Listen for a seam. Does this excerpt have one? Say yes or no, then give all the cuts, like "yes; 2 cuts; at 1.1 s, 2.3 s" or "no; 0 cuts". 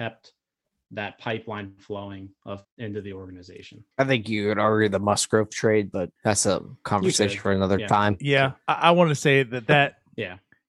yes; 3 cuts; at 2.6 s, 3.9 s, 6.2 s